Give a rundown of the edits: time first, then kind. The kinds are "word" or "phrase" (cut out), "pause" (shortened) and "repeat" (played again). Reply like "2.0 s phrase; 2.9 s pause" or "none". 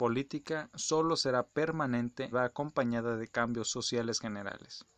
2.3 s word